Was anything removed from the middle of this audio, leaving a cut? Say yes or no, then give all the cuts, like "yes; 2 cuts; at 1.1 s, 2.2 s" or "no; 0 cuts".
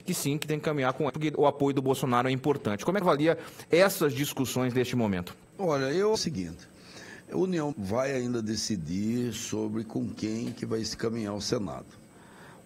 yes; 4 cuts; at 1.1 s, 3.0 s, 6.2 s, 7.7 s